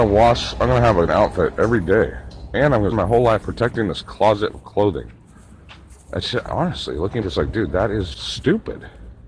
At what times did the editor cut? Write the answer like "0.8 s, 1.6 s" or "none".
1.1 s, 2.9 s, 3.4 s, 4.5 s, 6.5 s, 7.2 s, 8.1 s

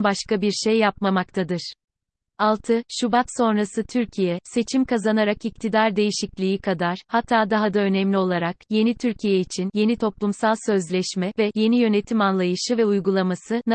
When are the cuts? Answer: none

